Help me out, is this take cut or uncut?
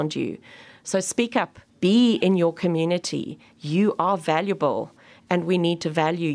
cut